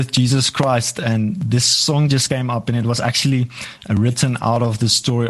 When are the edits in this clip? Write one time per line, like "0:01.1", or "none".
none